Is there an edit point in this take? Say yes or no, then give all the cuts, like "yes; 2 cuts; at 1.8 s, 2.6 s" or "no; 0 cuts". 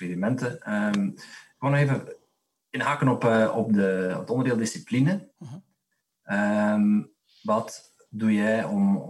no; 0 cuts